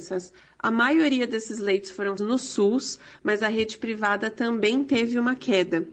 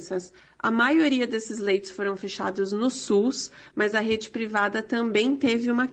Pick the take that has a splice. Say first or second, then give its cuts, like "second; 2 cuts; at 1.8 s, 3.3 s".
first; 1 cut; at 2.2 s